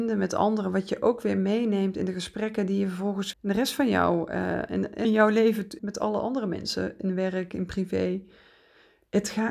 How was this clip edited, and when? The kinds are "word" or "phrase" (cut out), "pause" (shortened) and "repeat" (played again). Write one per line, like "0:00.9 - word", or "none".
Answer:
0:03.3 - word
0:05.0 - phrase
0:05.8 - word